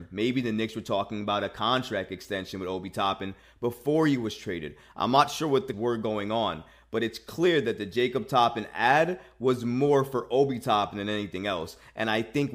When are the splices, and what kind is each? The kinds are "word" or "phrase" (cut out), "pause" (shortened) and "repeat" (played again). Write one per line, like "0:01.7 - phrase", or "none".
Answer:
0:05.7 - word